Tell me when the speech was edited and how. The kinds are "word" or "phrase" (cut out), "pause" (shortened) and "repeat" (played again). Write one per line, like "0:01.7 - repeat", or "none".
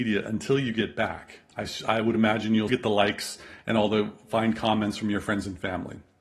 0:01.5 - pause
0:02.7 - word